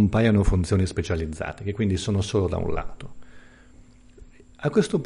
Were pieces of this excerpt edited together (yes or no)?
no